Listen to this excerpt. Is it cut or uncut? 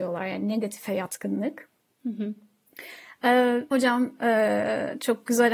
cut